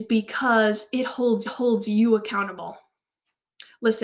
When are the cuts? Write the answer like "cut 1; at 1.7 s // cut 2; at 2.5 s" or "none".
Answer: cut 1; at 1.5 s